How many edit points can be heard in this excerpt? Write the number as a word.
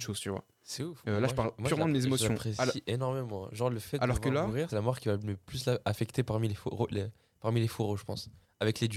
one